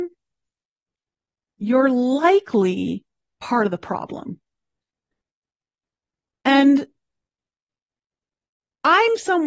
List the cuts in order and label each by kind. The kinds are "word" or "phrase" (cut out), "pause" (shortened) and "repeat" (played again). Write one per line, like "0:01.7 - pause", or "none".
none